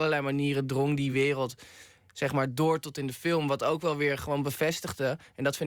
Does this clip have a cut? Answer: no; 0 cuts

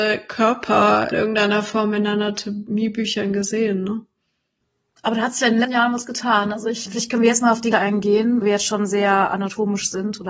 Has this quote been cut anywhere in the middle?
yes; 5 cuts; at 1.1 s, 5.6 s, 6.9 s, 7.7 s, 8.4 s

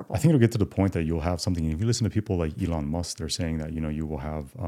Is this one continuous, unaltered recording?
yes; 0 cuts

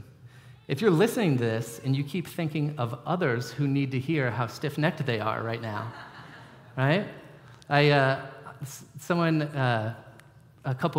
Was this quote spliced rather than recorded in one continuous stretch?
no; 0 cuts

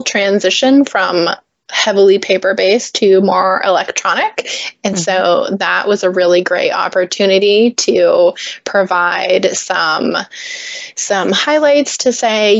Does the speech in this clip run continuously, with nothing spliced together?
yes; 0 cuts

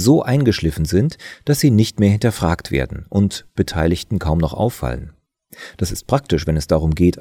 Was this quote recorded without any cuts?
yes; 0 cuts

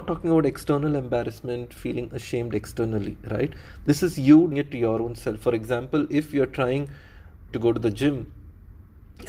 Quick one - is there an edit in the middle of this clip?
yes; 2 cuts; at 4.5 s, 7.5 s

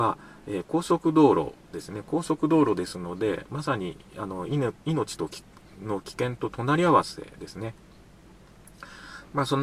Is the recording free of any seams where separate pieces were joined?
yes; 0 cuts

